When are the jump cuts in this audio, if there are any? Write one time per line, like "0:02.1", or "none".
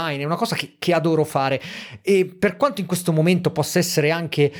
none